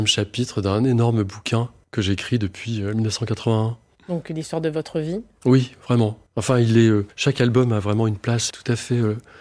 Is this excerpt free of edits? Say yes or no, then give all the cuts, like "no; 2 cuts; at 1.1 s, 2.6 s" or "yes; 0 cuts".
no; 3 cuts; at 6.3 s, 7.1 s, 8.5 s